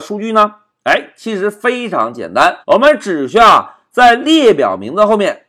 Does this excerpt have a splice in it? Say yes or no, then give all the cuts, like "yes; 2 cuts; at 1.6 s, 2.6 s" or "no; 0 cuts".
yes; 1 cut; at 2.6 s